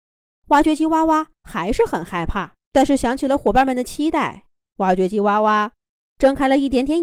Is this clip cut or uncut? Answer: cut